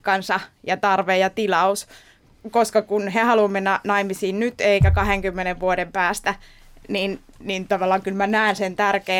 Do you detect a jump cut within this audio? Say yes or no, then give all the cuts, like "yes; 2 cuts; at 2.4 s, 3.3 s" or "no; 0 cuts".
no; 0 cuts